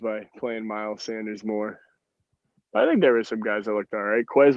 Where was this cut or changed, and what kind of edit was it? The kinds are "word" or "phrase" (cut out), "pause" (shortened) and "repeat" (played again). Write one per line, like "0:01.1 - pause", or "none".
none

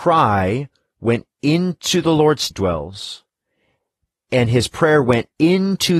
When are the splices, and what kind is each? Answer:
0:02.5 - phrase

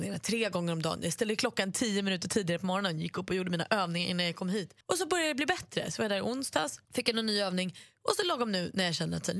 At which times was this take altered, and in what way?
0:04.8 - pause
0:06.8 - pause

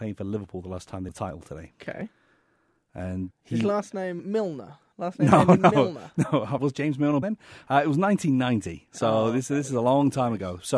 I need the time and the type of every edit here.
0:01.1 - word
0:01.7 - pause
0:03.3 - word
0:04.2 - phrase
0:06.6 - word
0:07.2 - word

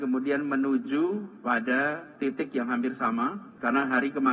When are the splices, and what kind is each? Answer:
none

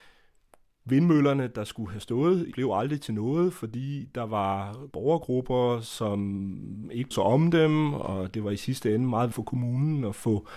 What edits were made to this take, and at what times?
0:02.5 - word
0:04.9 - word
0:07.1 - word
0:09.3 - word

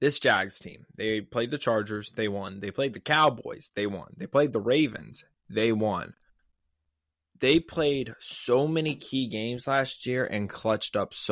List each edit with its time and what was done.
none

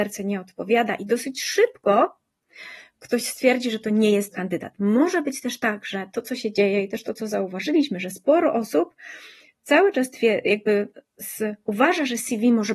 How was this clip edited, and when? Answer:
0:04.3 - word

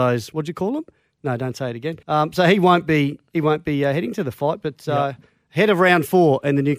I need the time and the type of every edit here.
0:02.0 - pause

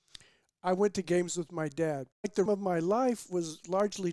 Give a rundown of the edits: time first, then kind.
0:02.5 - word

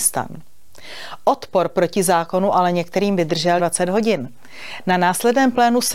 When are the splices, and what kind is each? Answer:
0:03.6 - word

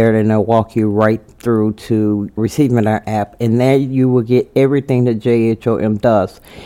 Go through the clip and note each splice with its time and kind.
0:02.4 - word

